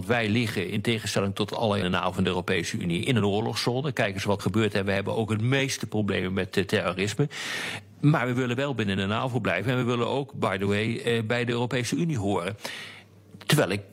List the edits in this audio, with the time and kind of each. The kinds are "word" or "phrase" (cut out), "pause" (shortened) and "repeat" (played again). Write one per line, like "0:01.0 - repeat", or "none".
0:01.8 - phrase
0:04.4 - word